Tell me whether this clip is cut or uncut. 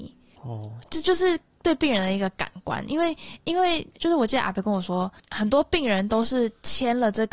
cut